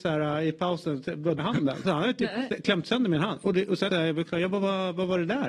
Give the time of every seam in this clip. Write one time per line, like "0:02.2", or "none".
0:01.4
0:01.8
0:03.9